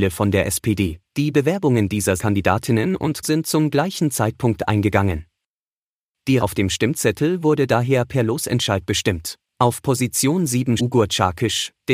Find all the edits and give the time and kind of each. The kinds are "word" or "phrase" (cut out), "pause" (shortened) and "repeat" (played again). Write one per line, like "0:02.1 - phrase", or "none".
0:01.1 - pause
0:02.2 - word
0:03.2 - word
0:06.4 - word
0:09.5 - pause
0:10.8 - word